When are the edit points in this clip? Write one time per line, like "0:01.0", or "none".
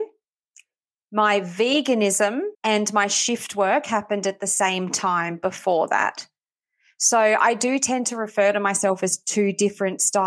0:02.5